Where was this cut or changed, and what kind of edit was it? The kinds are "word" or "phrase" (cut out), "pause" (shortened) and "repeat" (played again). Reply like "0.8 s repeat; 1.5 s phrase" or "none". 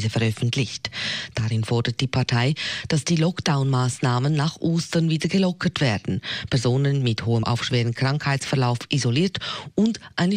7.4 s word